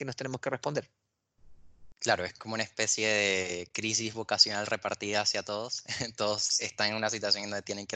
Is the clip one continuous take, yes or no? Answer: yes